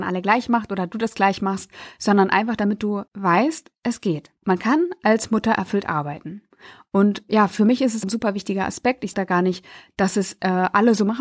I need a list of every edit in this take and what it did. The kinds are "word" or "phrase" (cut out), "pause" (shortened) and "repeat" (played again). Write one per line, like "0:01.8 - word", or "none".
0:03.1 - pause
0:04.4 - pause
0:08.0 - word
0:09.1 - word